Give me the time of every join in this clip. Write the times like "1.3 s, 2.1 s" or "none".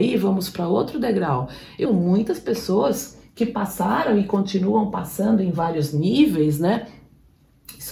1.9 s